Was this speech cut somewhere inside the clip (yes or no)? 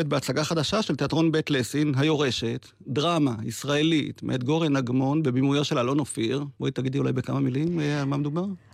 no